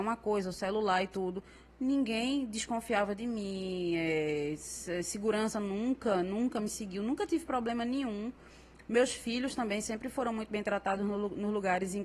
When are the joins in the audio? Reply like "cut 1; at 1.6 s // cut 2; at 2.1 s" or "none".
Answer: none